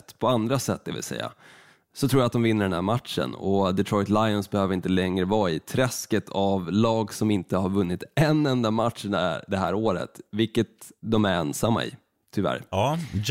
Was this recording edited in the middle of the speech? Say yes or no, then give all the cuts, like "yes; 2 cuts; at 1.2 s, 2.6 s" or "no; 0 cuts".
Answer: no; 0 cuts